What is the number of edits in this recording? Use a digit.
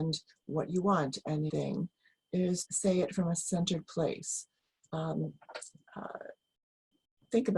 2